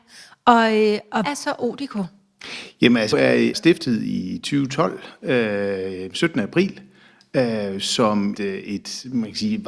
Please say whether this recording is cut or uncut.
cut